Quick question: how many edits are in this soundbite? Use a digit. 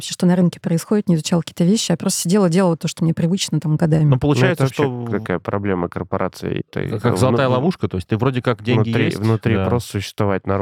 0